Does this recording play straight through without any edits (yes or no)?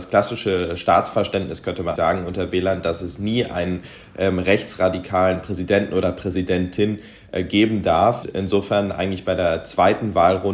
no